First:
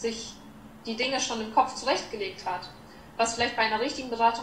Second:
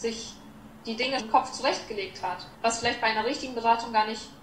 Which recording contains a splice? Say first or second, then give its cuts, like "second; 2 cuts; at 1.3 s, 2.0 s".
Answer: second; 2 cuts; at 1.2 s, 2.5 s